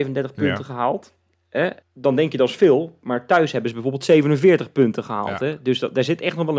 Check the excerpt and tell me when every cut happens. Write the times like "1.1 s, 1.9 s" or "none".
1.8 s